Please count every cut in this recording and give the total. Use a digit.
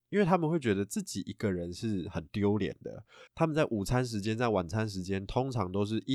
1